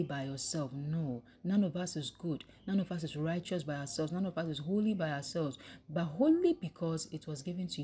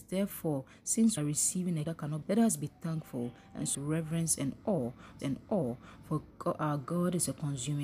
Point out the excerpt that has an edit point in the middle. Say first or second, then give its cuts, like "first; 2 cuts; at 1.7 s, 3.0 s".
second; 5 cuts; at 1.2 s, 1.8 s, 2.2 s, 3.7 s, 5.2 s